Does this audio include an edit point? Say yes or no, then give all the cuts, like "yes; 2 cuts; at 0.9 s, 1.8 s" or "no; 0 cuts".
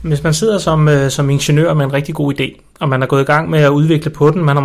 no; 0 cuts